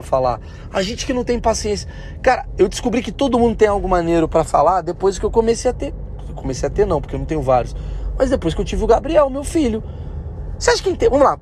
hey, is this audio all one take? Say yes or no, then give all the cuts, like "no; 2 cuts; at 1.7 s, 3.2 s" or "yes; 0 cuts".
yes; 0 cuts